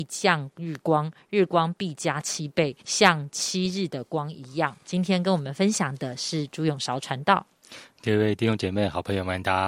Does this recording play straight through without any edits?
no; 2 cuts; at 2.8 s, 4.8 s

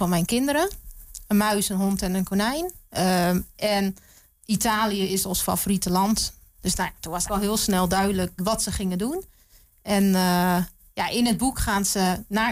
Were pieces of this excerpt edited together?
yes; 2 cuts; at 7.3 s, 8.4 s

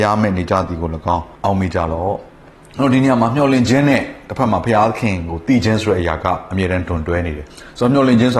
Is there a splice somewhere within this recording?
yes; 3 cuts; at 1.3 s, 2.3 s, 7.5 s

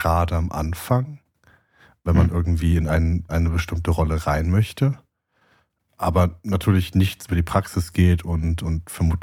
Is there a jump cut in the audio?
yes; 1 cut; at 3.3 s

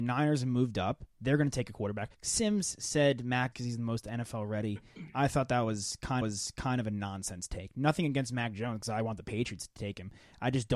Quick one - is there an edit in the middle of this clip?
yes; 3 cuts; at 2.1 s, 3.5 s, 6.2 s

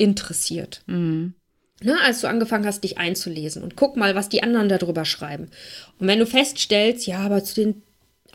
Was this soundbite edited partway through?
no; 0 cuts

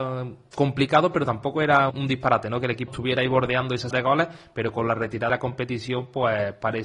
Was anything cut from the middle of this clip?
yes; 4 cuts; at 1.9 s, 2.9 s, 3.9 s, 5.3 s

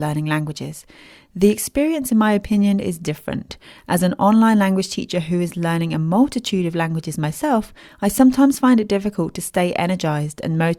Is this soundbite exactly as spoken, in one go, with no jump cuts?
yes; 0 cuts

